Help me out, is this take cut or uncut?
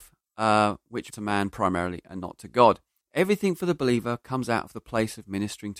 cut